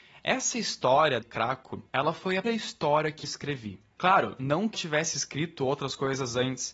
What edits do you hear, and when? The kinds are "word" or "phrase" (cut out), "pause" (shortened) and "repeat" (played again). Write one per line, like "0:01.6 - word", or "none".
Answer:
0:01.2 - word
0:01.9 - pause
0:02.4 - word
0:03.2 - word
0:04.7 - word